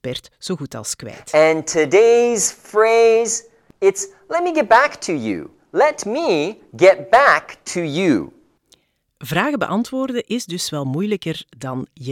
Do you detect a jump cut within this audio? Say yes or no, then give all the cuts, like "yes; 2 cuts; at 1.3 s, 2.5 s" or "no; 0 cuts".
no; 0 cuts